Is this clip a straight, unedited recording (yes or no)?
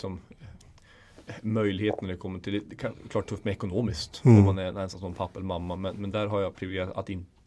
yes